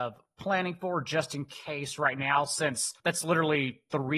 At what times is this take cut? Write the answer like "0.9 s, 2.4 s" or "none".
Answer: 3.0 s